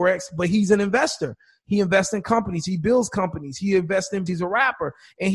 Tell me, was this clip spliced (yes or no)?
yes